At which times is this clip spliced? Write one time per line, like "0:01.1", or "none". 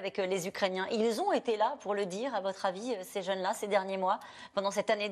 none